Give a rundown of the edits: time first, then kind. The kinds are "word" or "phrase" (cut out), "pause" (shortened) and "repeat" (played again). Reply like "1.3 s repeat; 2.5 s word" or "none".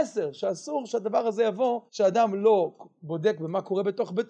1.9 s pause